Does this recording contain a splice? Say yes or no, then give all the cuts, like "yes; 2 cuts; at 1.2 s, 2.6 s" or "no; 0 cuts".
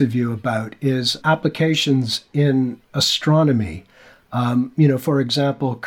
yes; 1 cut; at 1.2 s